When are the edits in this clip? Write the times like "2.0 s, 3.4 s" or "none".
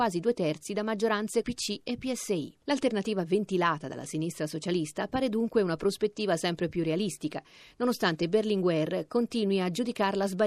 1.4 s, 2.6 s